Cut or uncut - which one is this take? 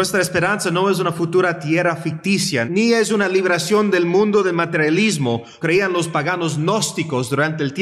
cut